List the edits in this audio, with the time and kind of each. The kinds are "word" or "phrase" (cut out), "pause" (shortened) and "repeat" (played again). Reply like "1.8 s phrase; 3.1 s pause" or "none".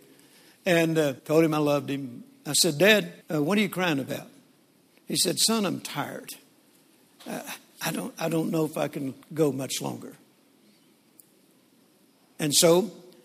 1.2 s pause; 3.2 s pause; 9.2 s pause